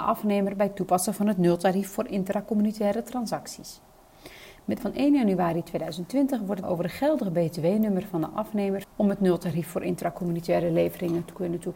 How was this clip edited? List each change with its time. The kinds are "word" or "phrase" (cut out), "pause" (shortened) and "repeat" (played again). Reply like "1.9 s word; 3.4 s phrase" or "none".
4.8 s word; 6.6 s phrase; 8.8 s word